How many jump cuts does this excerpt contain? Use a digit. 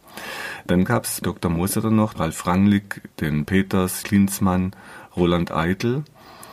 4